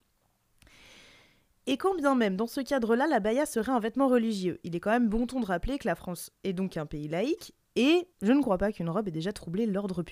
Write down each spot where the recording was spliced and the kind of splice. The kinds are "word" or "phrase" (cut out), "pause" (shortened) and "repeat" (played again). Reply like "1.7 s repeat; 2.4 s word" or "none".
8.1 s pause